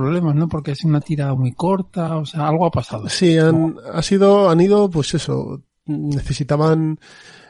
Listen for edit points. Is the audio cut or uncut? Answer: uncut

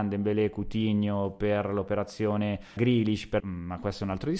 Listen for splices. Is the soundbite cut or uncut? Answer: cut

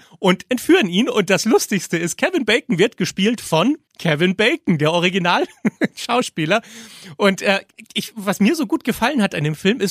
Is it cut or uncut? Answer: cut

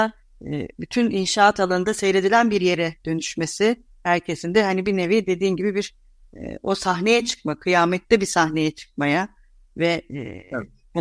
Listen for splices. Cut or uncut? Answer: uncut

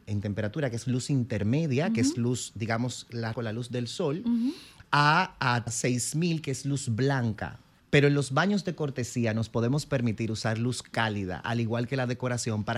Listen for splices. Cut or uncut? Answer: cut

